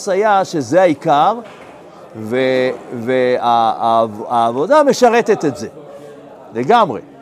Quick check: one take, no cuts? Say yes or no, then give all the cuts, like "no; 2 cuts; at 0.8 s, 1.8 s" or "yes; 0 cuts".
yes; 0 cuts